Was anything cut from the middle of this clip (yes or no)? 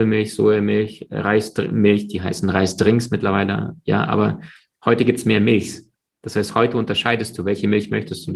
no